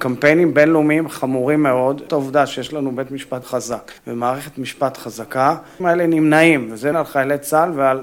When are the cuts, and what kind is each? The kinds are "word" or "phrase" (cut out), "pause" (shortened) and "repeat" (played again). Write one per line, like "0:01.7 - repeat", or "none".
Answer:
0:02.1 - word
0:03.4 - word
0:04.0 - pause
0:05.8 - phrase
0:06.9 - word